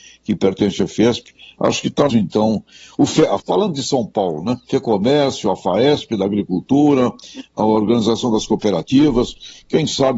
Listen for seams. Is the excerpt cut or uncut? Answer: cut